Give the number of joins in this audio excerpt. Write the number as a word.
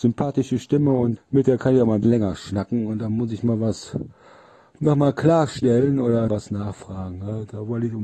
three